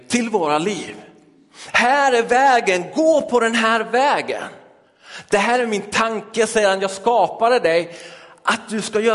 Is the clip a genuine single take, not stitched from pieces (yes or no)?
yes